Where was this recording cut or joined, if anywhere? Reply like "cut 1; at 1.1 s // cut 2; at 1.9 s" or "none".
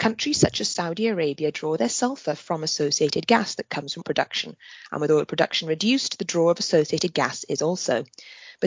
cut 1; at 4.0 s